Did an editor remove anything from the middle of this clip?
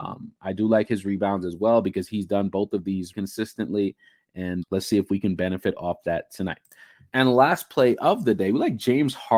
yes; 2 cuts; at 3.1 s, 4.6 s

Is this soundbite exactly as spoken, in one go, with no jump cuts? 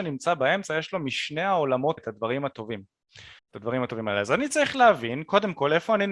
no; 2 cuts; at 2.0 s, 3.4 s

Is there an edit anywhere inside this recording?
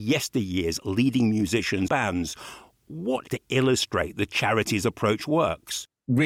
yes; 2 cuts; at 1.9 s, 3.3 s

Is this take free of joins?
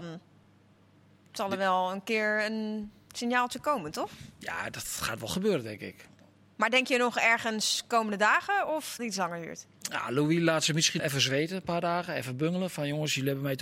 no; 2 cuts; at 9.0 s, 11.0 s

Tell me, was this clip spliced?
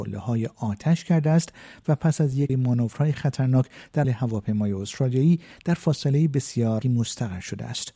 yes; 3 cuts; at 2.5 s, 4.0 s, 6.8 s

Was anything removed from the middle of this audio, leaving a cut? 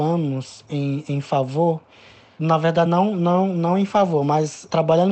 no; 0 cuts

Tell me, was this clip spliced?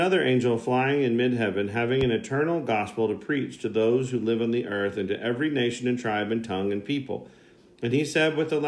no; 0 cuts

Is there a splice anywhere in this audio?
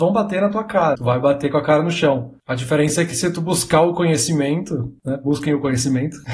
yes; 1 cut; at 0.9 s

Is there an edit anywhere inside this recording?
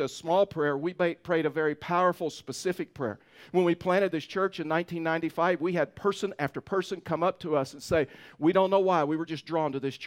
no; 0 cuts

